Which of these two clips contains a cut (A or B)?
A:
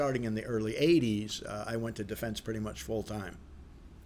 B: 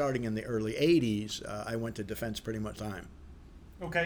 B